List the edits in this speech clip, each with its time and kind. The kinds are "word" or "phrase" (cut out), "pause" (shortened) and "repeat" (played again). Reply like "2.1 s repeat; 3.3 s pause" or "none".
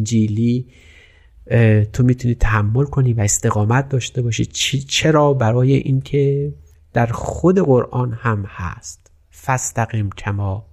none